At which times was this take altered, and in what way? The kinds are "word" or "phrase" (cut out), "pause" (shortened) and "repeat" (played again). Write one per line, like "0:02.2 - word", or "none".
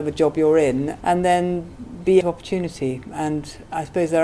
0:01.0 - word
0:02.2 - word

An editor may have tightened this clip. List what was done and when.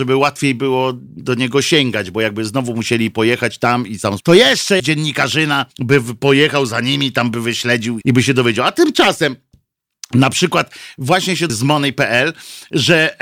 0:04.2 - word
0:04.8 - word
0:05.7 - pause
0:08.0 - word
0:11.5 - word

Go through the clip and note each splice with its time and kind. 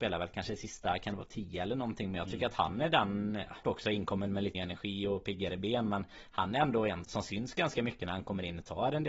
0:03.6 - word
0:04.5 - word
0:07.0 - word

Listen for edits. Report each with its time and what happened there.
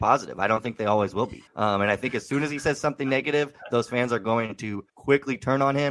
0:01.5 - pause
0:04.9 - pause

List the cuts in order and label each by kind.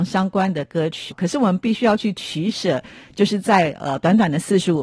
0:01.1 - word

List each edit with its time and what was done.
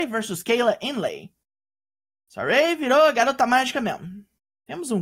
none

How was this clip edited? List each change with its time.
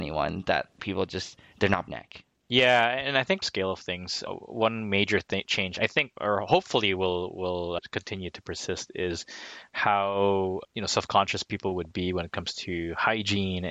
0:01.9 - phrase
0:03.4 - phrase

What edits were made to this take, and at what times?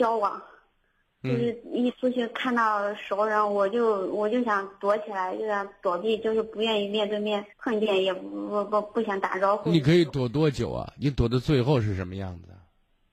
0:07.5 - pause

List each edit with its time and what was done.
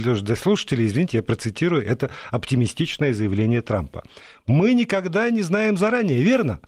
none

